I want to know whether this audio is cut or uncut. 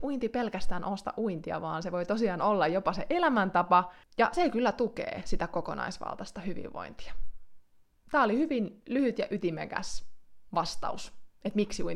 uncut